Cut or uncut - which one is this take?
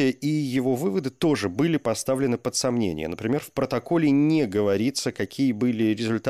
uncut